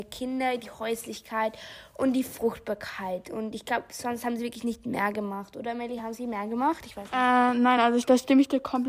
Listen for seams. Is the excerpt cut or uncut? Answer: uncut